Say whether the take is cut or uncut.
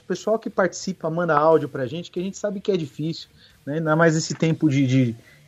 uncut